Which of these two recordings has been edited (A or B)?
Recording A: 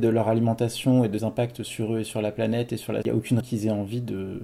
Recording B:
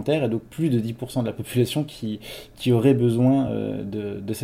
A